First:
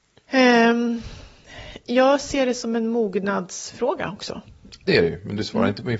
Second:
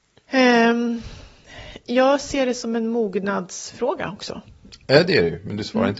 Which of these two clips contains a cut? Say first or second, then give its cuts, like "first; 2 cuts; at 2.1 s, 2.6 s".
first; 1 cut; at 4.9 s